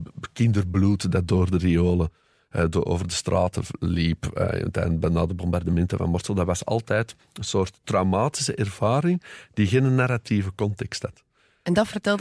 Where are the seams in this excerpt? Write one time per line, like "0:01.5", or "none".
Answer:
none